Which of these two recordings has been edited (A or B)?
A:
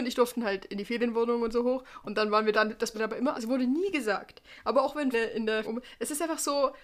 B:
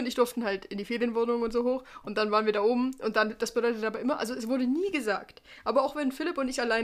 A